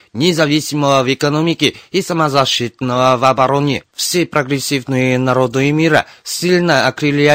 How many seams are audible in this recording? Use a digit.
1